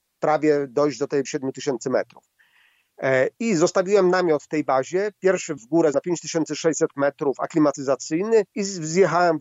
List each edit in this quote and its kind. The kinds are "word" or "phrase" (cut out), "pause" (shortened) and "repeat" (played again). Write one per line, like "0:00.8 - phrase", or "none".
0:01.3 - word
0:03.3 - pause
0:05.6 - word
0:05.9 - word
0:08.5 - pause